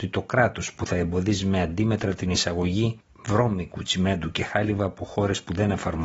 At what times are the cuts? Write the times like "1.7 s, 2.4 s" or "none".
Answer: none